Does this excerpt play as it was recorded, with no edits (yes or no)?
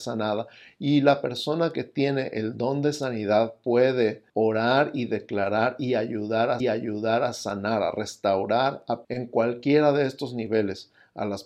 no